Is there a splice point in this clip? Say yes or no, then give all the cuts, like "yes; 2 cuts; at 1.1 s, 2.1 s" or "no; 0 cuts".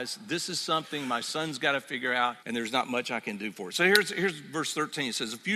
yes; 1 cut; at 2.4 s